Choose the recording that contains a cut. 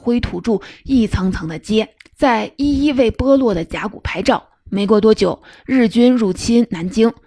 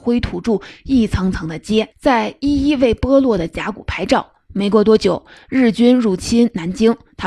second; 1 cut; at 1.9 s

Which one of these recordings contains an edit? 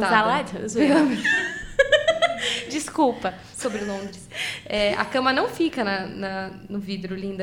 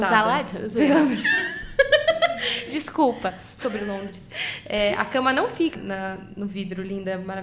second; 1 cut; at 5.7 s

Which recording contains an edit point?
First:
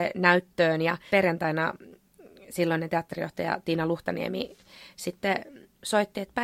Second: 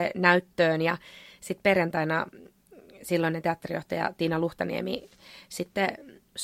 first; 1 cut; at 1.1 s

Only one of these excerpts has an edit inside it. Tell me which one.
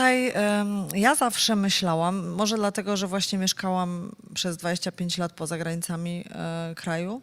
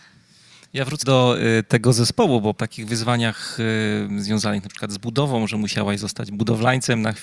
second; 2 cuts; at 1.0 s, 2.6 s

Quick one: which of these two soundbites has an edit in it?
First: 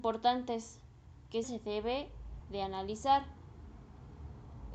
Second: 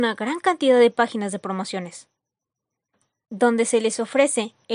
first; 2 cuts; at 1.4 s, 2.4 s

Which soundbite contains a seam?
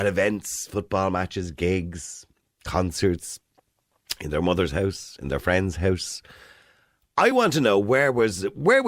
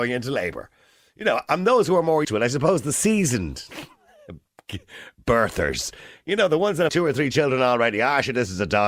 second; 2 cuts; at 2.2 s, 6.9 s

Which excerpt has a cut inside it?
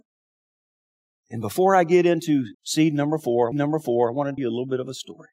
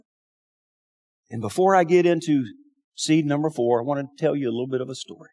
first; 3 cuts; at 2.5 s, 3.5 s, 4.4 s

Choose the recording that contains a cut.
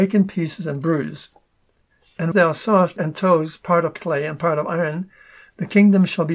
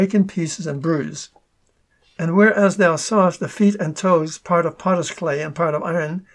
first; 3 cuts; at 2.3 s, 3.0 s, 4.0 s

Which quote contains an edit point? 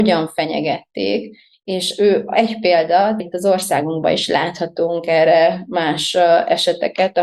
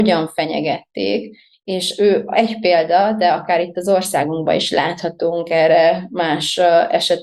first; 1 cut; at 3.2 s

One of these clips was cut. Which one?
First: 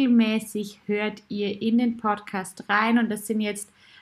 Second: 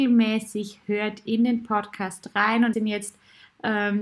second; 2 cuts; at 1.3 s, 2.7 s

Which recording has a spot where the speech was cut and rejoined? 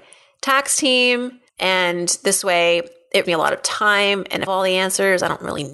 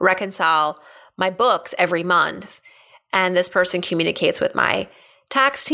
first; 3 cuts; at 1.5 s, 3.2 s, 4.5 s

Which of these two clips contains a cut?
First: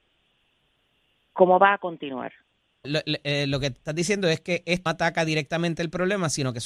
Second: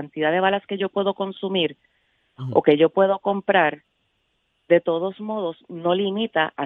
first; 2 cuts; at 2.8 s, 4.9 s

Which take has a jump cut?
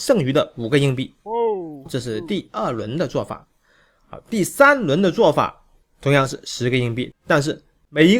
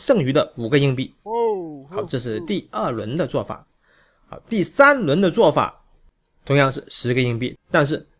first; 2 cuts; at 1.9 s, 5.8 s

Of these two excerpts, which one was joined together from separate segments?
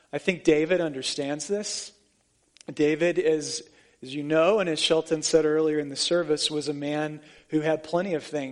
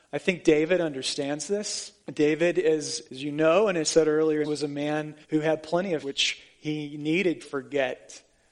second; 7 cuts; at 2.0 s, 3.1 s, 3.8 s, 4.4 s, 5.2 s, 6.0 s, 7.4 s

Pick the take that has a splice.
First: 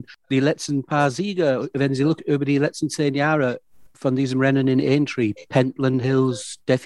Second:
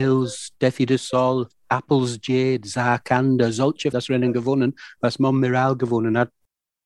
second; 1 cut; at 3.9 s

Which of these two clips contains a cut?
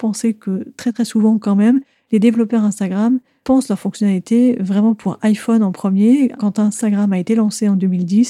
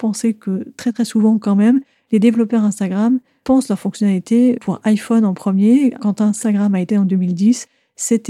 second; 2 cuts; at 4.6 s, 6.9 s

